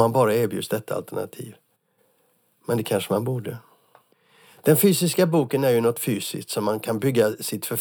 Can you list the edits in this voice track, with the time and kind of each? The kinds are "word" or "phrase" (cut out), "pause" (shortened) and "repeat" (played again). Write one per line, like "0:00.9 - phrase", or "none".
none